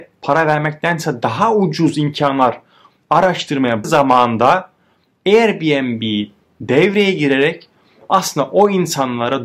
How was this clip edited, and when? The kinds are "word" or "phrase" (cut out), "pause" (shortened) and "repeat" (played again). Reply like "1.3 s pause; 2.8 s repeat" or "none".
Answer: 3.8 s word